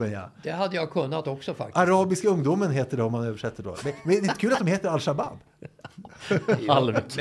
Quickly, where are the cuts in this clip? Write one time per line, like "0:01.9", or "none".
none